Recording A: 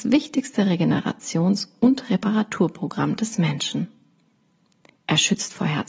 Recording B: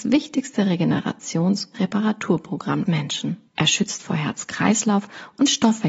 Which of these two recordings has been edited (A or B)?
B